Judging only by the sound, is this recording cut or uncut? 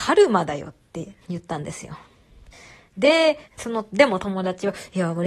cut